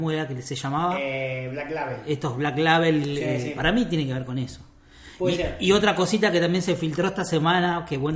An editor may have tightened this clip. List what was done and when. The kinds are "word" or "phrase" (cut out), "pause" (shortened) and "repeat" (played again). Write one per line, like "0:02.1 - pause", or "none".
none